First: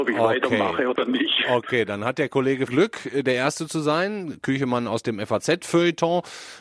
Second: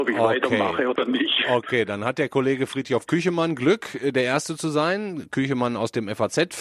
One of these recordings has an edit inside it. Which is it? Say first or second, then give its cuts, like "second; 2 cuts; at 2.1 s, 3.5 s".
first; 1 cut; at 2.7 s